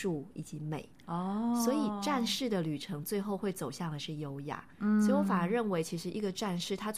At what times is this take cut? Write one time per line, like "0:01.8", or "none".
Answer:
0:00.9
0:04.7